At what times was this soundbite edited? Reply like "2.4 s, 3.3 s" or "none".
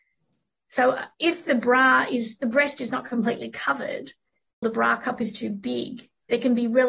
1.1 s, 4.6 s